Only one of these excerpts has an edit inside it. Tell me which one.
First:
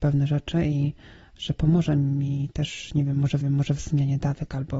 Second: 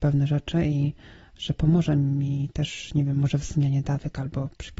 first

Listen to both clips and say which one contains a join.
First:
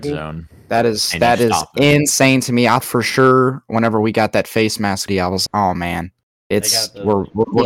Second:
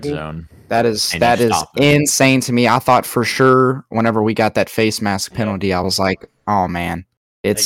first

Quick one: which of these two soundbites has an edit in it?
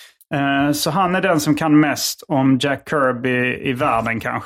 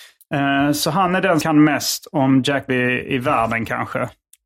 second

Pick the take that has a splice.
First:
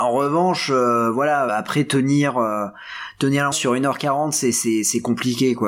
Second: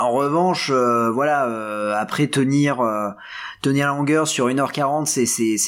first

